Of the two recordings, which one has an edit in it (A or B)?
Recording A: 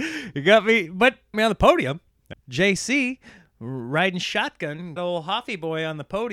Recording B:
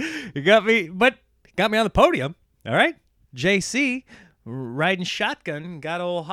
A